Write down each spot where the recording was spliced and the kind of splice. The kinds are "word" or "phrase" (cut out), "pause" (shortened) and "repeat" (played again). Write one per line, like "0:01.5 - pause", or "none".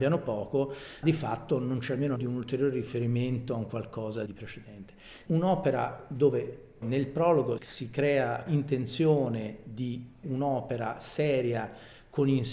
0:01.0 - word
0:02.2 - word
0:04.3 - word
0:05.3 - word
0:06.8 - word
0:07.6 - word
0:08.5 - word
0:10.2 - word

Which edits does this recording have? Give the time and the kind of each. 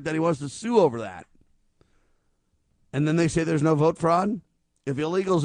none

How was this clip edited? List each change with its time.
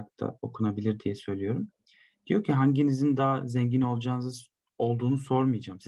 none

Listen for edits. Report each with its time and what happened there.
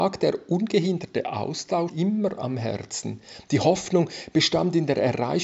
0:01.9 - word

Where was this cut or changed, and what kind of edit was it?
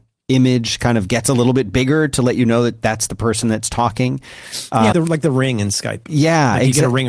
0:04.9 - word

